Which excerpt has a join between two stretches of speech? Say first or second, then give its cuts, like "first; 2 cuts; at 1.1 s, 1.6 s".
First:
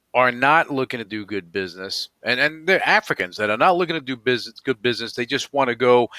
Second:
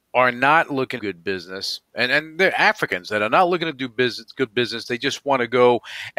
second; 1 cut; at 1.0 s